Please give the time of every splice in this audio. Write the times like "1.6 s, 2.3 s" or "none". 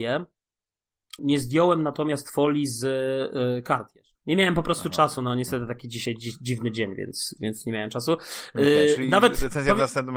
1.2 s, 4.1 s, 7.4 s